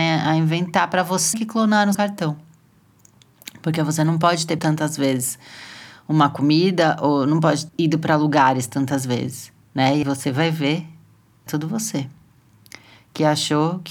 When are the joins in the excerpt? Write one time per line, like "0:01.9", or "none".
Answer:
0:01.3
0:01.9
0:04.6
0:07.7
0:10.0
0:11.5